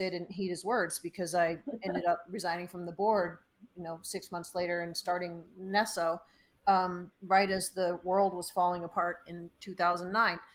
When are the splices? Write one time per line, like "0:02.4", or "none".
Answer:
none